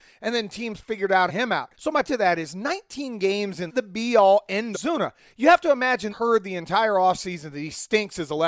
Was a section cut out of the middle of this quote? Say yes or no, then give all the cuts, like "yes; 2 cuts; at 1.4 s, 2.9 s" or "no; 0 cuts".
yes; 6 cuts; at 1.3 s, 1.7 s, 2.0 s, 3.7 s, 4.7 s, 6.1 s